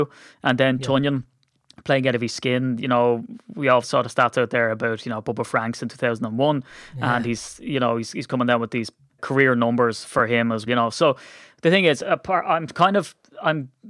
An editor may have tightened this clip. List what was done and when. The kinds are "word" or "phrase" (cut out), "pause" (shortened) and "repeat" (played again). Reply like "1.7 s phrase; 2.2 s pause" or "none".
3.8 s word; 9.2 s word; 10.7 s word